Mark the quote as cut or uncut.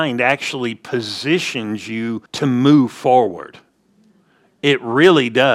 cut